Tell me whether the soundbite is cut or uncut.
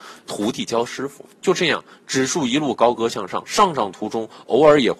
cut